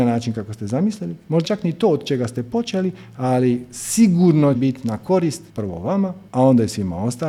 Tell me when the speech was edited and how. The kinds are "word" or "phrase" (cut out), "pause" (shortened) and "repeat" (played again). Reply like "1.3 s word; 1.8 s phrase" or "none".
1.4 s word; 4.5 s word; 5.5 s pause; 6.3 s pause